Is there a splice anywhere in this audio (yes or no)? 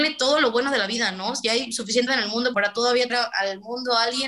yes